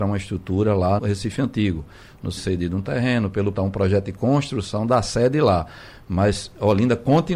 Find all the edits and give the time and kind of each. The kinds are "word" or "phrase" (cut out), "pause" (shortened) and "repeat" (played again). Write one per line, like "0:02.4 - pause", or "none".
0:01.0 - word
0:02.4 - word
0:03.5 - word